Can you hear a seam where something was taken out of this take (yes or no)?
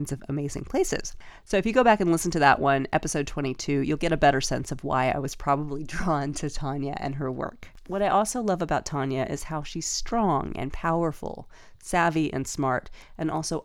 no